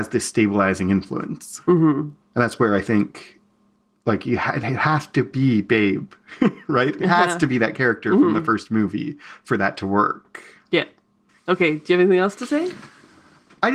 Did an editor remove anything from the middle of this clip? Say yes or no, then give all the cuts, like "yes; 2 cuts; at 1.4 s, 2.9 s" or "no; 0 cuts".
no; 0 cuts